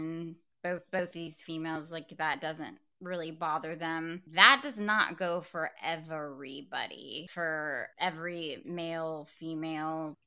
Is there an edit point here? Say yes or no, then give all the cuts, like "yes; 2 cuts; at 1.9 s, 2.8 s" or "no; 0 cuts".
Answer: no; 0 cuts